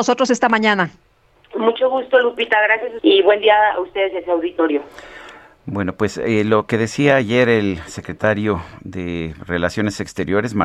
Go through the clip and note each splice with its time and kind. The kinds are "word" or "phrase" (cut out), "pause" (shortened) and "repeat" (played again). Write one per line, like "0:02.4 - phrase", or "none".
0:03.0 - phrase